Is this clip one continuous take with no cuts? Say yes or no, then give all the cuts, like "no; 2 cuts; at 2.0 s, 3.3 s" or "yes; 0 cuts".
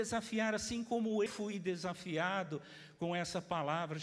no; 1 cut; at 1.3 s